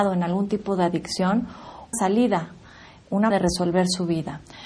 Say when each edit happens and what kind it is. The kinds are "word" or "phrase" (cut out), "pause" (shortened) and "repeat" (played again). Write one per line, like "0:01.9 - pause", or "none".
0:01.9 - word
0:03.3 - word